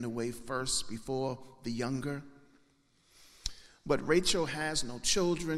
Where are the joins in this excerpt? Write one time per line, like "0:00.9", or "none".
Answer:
none